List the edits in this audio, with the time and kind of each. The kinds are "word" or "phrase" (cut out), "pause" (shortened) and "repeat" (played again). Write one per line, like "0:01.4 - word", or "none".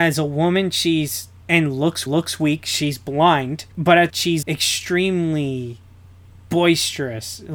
0:01.4 - word
0:02.1 - repeat
0:03.7 - pause
0:04.1 - phrase
0:04.4 - word